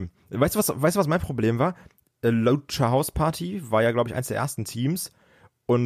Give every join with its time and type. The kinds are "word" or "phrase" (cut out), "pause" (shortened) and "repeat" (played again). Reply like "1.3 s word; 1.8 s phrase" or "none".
none